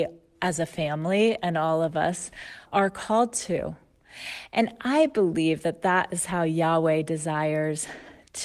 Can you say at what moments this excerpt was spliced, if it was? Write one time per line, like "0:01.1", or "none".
0:02.7